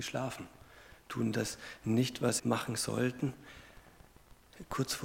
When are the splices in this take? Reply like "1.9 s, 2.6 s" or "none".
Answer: 2.4 s